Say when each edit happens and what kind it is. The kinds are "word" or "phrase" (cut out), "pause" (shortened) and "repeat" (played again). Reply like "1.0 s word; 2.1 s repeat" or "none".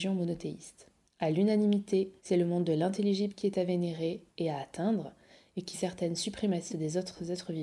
1.0 s pause; 2.2 s pause; 4.3 s pause; 5.7 s phrase; 6.7 s phrase